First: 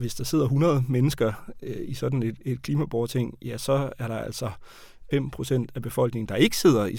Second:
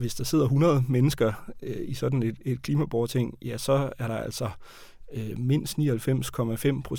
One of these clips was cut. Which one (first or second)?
first